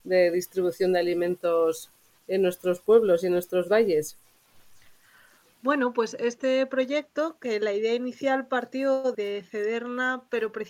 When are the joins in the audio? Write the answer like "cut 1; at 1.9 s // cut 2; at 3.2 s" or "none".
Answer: cut 1; at 9.1 s